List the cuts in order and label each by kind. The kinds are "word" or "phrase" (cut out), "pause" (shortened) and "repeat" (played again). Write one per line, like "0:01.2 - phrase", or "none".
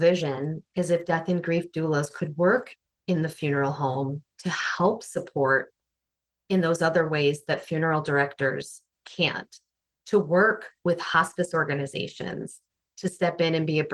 none

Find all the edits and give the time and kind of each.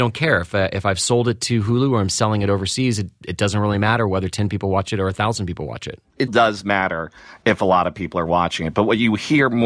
0:06.3 - word

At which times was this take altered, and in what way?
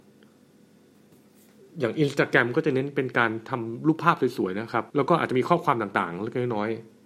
0:04.9 - pause

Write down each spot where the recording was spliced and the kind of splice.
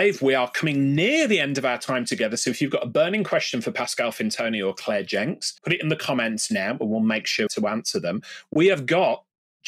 0:05.6 - pause
0:07.5 - word

